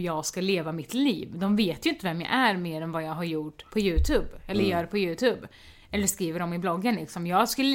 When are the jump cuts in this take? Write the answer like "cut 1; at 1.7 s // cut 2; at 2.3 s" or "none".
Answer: cut 1; at 3.7 s